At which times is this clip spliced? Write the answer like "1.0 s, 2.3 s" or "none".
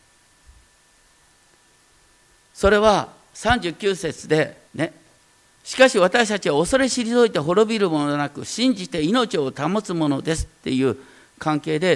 4.7 s

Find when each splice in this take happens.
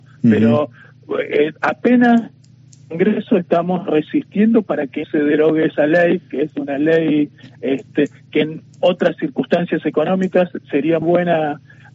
5.0 s, 11.0 s

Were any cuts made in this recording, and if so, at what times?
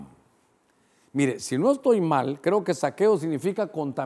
none

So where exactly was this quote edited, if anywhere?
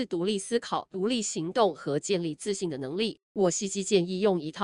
3.2 s

